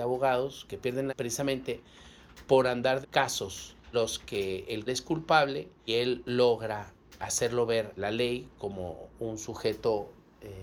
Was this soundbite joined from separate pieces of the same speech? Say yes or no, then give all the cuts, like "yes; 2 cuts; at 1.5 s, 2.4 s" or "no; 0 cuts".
yes; 7 cuts; at 1.1 s, 3.0 s, 3.9 s, 4.9 s, 5.9 s, 7.2 s, 8.0 s